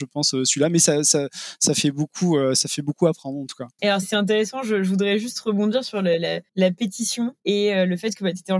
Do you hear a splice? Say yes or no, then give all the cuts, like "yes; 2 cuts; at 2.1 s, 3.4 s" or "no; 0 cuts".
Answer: yes; 3 cuts; at 4.0 s, 6.5 s, 7.4 s